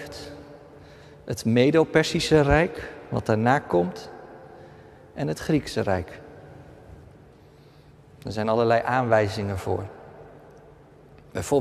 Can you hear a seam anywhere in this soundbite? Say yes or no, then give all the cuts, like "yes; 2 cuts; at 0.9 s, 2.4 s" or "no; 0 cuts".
no; 0 cuts